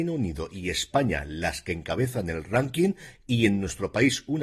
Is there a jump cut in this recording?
no; 0 cuts

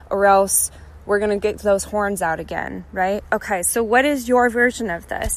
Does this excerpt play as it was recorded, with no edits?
yes; 0 cuts

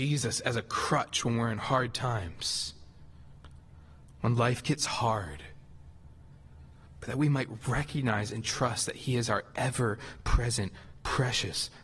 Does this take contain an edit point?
no; 0 cuts

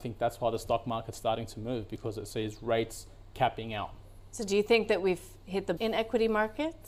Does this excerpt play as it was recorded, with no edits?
no; 1 cut; at 5.8 s

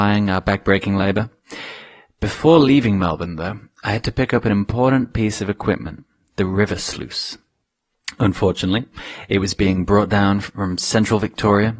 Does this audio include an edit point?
no; 0 cuts

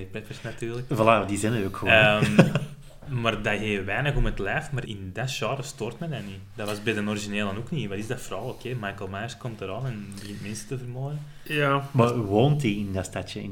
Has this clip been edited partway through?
yes; 1 cut; at 4.9 s

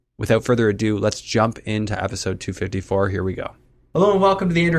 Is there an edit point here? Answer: no; 0 cuts

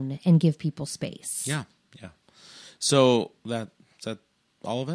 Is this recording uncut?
yes; 0 cuts

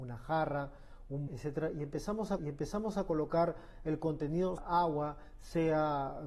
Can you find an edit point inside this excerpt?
yes; 3 cuts; at 1.3 s, 2.4 s, 4.6 s

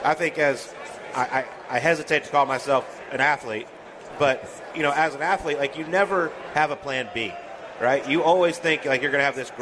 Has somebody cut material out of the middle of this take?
no; 0 cuts

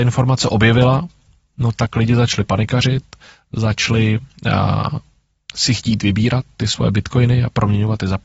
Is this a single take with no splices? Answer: yes; 0 cuts

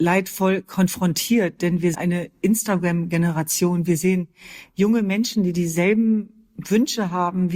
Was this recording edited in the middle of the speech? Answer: yes; 1 cut; at 1.9 s

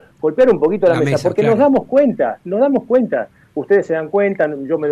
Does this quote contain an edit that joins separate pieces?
no; 0 cuts

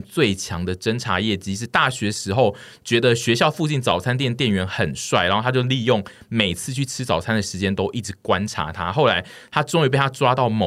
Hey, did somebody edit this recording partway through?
no; 0 cuts

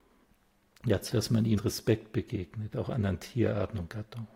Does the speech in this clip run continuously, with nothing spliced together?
no; 2 cuts; at 1.1 s, 1.6 s

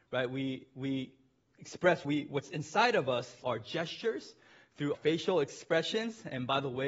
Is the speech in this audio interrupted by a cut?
yes; 4 cuts; at 1.5 s, 2.0 s, 3.4 s, 4.9 s

